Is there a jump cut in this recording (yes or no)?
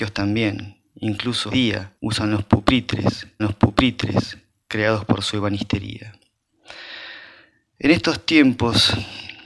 yes